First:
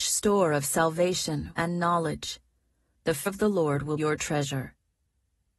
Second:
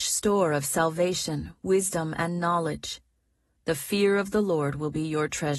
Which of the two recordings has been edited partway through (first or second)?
first